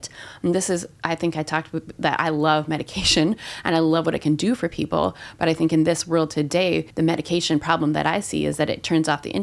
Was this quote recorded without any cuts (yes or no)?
no